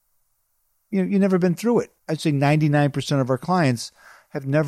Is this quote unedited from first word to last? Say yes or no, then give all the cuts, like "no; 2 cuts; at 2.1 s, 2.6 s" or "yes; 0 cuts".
no; 1 cut; at 2.0 s